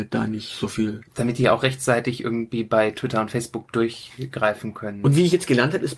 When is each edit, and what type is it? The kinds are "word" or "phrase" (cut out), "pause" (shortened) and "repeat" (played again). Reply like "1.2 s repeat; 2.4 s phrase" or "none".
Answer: 1.1 s pause

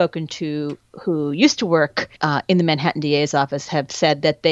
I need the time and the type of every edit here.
2.2 s pause

